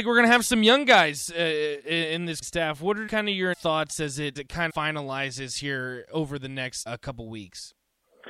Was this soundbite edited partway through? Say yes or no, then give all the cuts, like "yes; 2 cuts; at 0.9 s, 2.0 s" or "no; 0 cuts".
yes; 6 cuts; at 2.4 s, 3.1 s, 3.5 s, 4.4 s, 4.7 s, 6.9 s